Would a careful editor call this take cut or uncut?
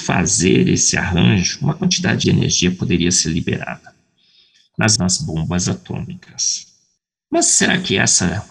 cut